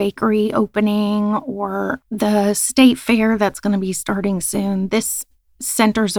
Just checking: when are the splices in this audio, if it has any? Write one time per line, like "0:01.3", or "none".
none

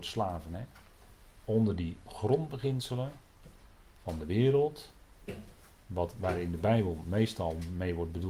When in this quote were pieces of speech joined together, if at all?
none

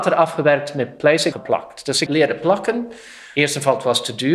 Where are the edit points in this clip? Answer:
0:01.3
0:02.1

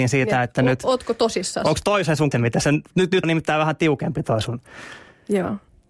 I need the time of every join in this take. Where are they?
0:02.3
0:03.2

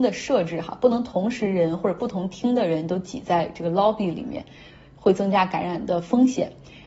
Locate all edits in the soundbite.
none

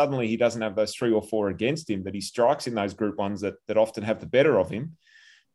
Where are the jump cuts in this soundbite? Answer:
none

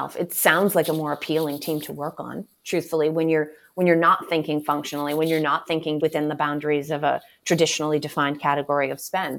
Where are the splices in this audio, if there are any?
0:06.0

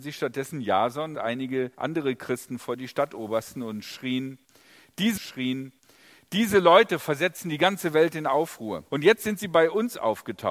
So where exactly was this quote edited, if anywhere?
0:01.1
0:01.7
0:05.2
0:08.9

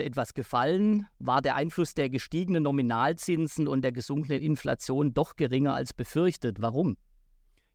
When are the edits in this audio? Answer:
0:01.1

